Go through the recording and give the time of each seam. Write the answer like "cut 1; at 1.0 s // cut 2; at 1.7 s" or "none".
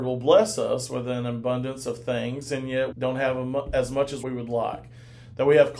cut 1; at 2.9 s // cut 2; at 4.2 s